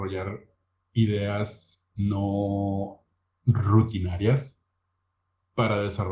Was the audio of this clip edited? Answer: no; 0 cuts

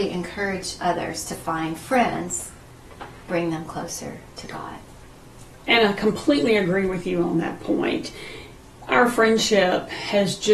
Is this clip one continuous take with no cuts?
no; 1 cut; at 3.3 s

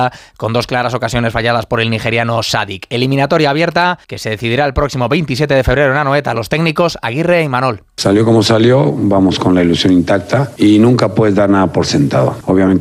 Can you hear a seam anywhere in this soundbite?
yes; 2 cuts; at 4.0 s, 7.9 s

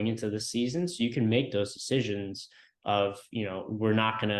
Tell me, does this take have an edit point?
no; 0 cuts

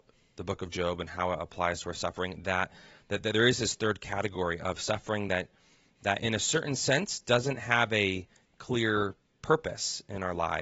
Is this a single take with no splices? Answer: yes; 0 cuts

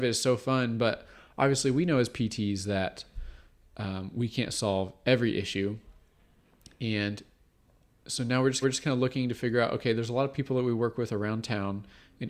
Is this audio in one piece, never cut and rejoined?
no; 1 cut; at 8.6 s

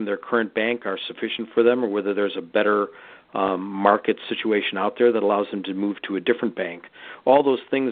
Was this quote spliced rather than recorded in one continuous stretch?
no; 0 cuts

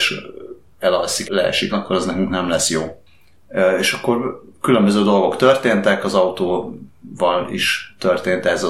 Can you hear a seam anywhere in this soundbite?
yes; 2 cuts; at 1.2 s, 1.7 s

